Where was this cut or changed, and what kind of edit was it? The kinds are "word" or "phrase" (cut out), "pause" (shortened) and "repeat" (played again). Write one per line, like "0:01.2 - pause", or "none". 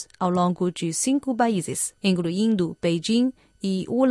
0:02.0 - pause